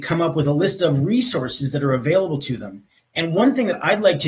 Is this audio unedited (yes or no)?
no